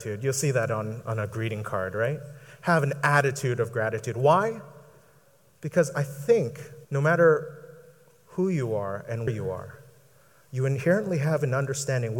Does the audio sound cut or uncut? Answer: cut